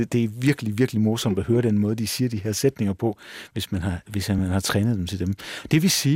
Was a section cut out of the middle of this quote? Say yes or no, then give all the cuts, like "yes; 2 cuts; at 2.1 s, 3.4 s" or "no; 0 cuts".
no; 0 cuts